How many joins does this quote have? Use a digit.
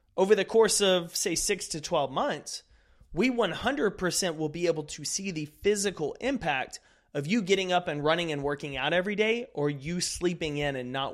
0